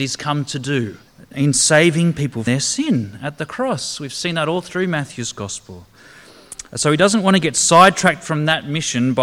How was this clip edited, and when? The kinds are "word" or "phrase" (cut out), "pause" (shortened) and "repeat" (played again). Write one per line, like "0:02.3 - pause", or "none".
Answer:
0:01.1 - pause
0:02.5 - word